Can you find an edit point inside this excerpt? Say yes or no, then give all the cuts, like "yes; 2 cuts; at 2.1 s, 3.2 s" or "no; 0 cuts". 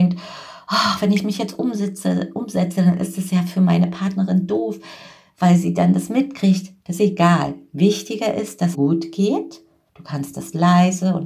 yes; 2 cuts; at 7.0 s, 8.7 s